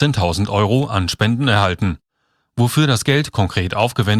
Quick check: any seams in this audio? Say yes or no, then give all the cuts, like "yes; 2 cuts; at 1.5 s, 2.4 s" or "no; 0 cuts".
no; 0 cuts